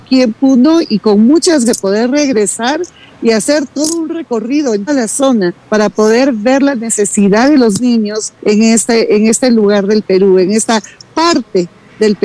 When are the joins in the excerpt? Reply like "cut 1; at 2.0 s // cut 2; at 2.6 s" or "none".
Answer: cut 1; at 1.6 s // cut 2; at 4.9 s // cut 3; at 5.6 s // cut 4; at 8.4 s